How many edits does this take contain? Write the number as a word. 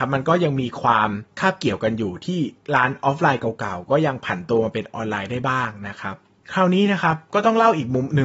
one